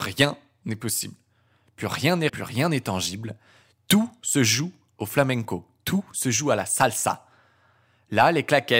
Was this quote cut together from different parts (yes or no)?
yes